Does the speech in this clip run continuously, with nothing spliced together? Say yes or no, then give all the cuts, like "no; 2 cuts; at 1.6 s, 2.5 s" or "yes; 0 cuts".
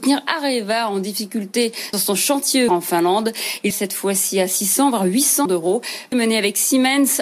no; 5 cuts; at 1.9 s, 2.7 s, 3.7 s, 5.5 s, 6.1 s